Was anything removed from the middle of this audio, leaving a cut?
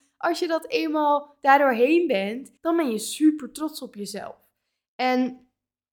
yes; 1 cut; at 2.6 s

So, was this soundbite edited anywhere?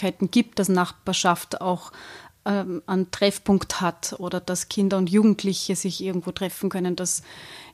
no; 0 cuts

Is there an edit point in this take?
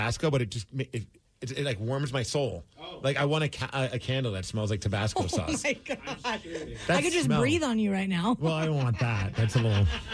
no; 0 cuts

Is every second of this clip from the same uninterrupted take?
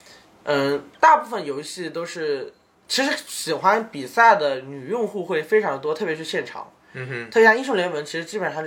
yes; 0 cuts

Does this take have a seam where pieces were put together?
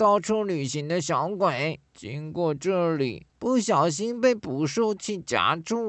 yes; 2 cuts; at 1.9 s, 3.3 s

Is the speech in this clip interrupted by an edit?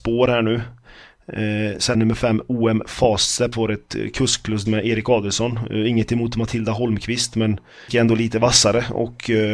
yes; 4 cuts; at 1.9 s, 3.5 s, 4.7 s, 7.9 s

